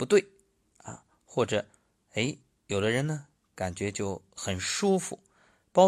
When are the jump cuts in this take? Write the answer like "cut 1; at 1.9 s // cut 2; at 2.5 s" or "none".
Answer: none